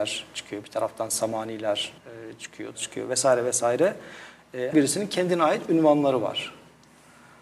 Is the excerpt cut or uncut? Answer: cut